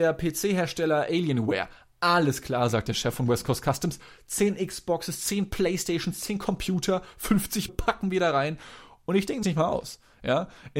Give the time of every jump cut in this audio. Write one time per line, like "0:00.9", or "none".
0:07.7
0:09.4